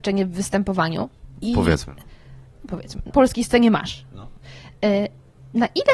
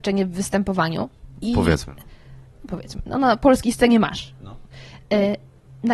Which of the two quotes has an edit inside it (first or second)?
first